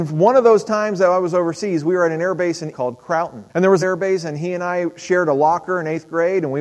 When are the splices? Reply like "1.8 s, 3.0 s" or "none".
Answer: 2.7 s, 3.5 s, 3.8 s